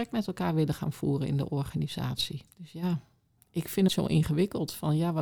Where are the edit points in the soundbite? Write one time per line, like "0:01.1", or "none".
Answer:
0:02.5
0:03.9